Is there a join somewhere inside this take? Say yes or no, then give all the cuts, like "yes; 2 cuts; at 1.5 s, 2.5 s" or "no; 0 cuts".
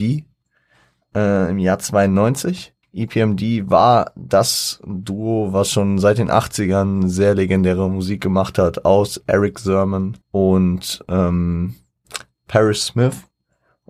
yes; 2 cuts; at 2.8 s, 10.2 s